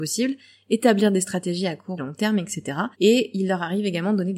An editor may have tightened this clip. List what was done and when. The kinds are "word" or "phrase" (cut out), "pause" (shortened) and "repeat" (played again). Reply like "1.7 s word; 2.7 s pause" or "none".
2.0 s phrase; 2.9 s pause